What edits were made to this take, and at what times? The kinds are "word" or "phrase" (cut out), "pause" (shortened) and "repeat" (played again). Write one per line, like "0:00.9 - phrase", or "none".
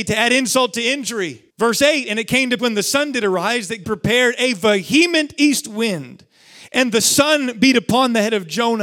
0:01.5 - pause
0:02.6 - word
0:03.8 - word